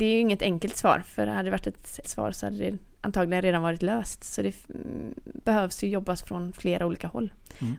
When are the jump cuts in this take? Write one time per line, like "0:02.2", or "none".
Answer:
0:02.0